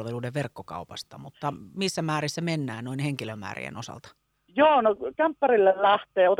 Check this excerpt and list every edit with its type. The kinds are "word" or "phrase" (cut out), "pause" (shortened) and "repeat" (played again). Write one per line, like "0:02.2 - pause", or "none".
none